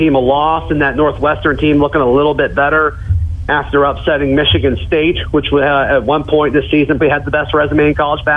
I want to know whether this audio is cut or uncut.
cut